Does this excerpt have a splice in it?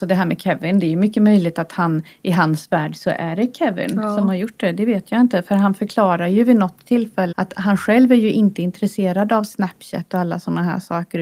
yes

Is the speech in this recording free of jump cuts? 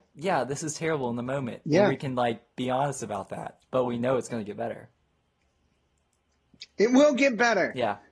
no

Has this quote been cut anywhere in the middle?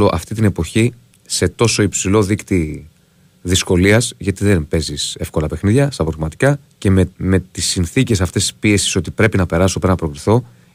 yes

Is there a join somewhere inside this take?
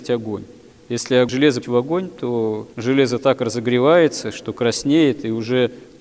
yes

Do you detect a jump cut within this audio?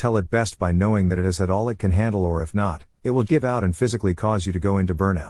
yes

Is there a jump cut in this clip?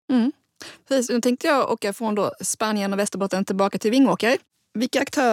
no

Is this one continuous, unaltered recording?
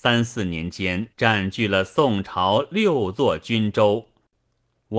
no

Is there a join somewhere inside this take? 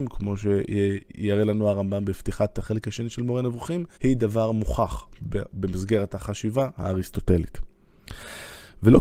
yes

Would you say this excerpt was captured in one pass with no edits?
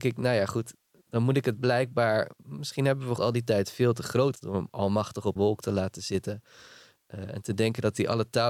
no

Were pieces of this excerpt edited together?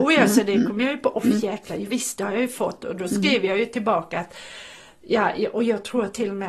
no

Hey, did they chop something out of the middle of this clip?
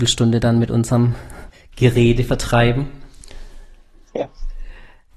yes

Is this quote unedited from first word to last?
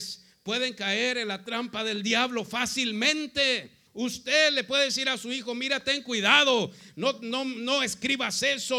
no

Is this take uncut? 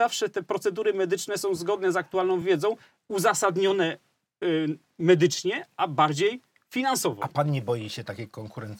yes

